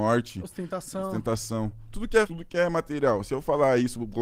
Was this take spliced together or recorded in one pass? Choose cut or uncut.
cut